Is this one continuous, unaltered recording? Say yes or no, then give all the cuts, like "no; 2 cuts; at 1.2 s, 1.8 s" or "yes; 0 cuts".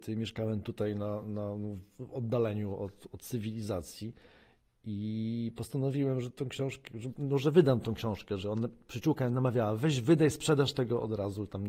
yes; 0 cuts